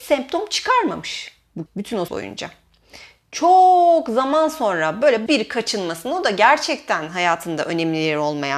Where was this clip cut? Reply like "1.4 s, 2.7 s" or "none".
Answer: 1.7 s, 2.1 s, 5.3 s